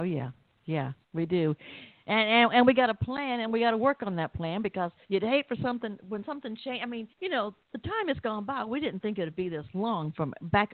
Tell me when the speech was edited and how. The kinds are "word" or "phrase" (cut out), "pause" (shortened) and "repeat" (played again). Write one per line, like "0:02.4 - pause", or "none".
0:01.0 - pause
0:05.0 - pause
0:07.1 - pause